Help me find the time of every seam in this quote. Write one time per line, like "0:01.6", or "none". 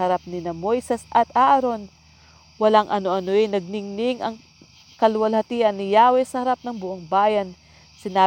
none